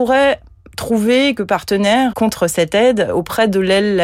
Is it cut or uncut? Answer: cut